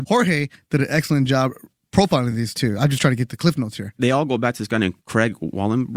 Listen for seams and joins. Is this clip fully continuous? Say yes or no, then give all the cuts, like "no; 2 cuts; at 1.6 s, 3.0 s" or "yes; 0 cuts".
yes; 0 cuts